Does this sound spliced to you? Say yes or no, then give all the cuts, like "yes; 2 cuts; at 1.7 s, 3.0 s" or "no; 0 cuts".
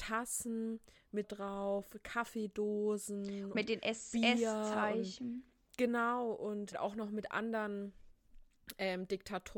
yes; 3 cuts; at 1.2 s, 3.5 s, 6.7 s